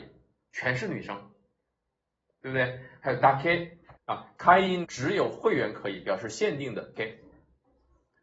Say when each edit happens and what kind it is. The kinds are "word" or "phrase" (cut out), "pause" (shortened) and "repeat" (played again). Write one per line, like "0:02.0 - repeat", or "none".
0:04.0 - pause
0:04.8 - phrase
0:07.0 - word